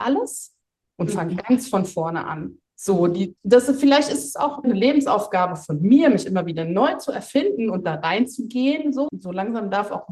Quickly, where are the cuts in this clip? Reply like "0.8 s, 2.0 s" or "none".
2.7 s, 3.4 s, 4.6 s, 9.1 s